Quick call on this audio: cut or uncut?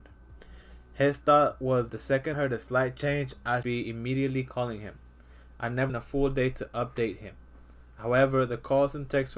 cut